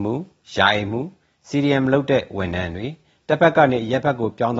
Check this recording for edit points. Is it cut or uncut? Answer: uncut